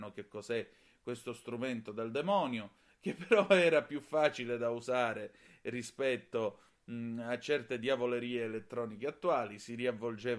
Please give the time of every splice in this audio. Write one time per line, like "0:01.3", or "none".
none